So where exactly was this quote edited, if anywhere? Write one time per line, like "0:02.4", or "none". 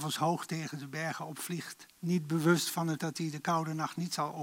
0:01.9
0:03.0

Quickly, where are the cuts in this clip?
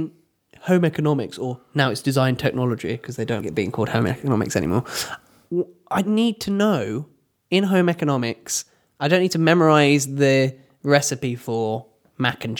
0:03.4
0:06.0

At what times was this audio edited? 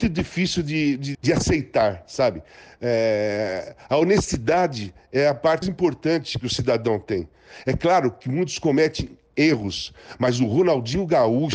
0:01.1
0:05.6

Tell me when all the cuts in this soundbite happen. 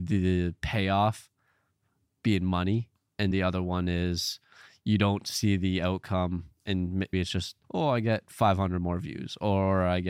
0:03.3
0:07.1
0:07.6

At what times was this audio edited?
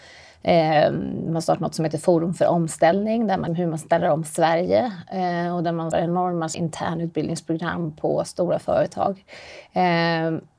0:03.5
0:05.9
0:06.5

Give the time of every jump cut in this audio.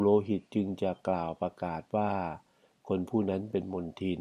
none

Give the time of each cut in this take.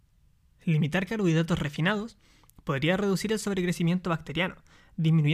none

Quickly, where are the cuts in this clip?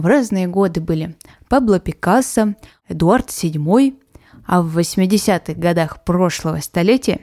none

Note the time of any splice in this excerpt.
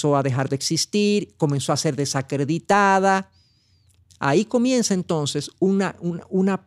none

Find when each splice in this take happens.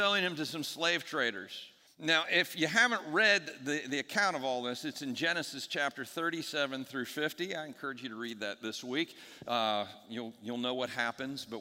0:01.8

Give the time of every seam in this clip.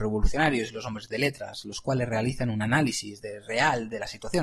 none

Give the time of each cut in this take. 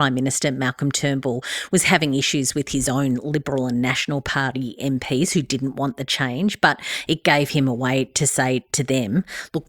none

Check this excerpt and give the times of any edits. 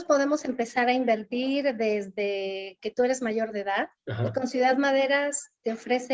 0:04.0

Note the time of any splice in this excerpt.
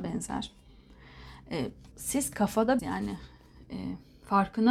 0:01.9
0:02.8

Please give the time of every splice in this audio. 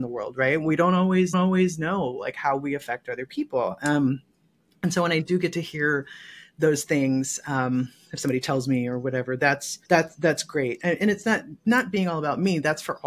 0:01.3
0:09.8

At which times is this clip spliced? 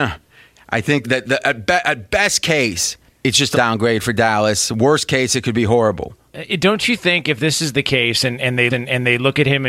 0:01.0
0:03.1
0:03.5
0:08.7

